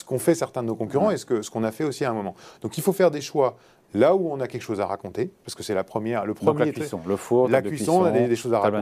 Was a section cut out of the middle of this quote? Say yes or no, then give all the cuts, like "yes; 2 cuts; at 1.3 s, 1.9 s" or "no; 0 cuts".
no; 0 cuts